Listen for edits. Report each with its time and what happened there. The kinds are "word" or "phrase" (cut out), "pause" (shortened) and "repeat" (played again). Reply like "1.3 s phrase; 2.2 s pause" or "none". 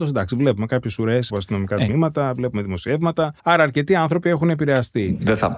1.3 s phrase; 3.4 s pause